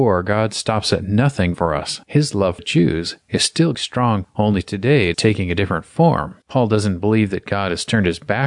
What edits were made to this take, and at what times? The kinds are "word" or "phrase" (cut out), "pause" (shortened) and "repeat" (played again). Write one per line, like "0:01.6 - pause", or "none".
0:01.5 - phrase
0:02.0 - pause
0:02.6 - word
0:03.2 - pause
0:03.7 - word
0:04.2 - word
0:05.1 - word
0:06.4 - pause